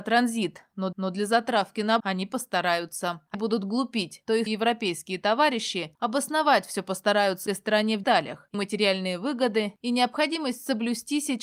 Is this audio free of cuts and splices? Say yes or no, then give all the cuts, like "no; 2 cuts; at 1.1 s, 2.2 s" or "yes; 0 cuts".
no; 7 cuts; at 0.9 s, 2.0 s, 3.3 s, 4.5 s, 7.5 s, 8.0 s, 8.5 s